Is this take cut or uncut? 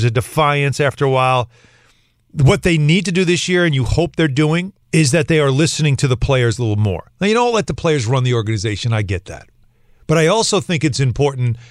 cut